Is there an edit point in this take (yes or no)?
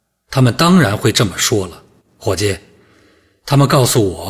no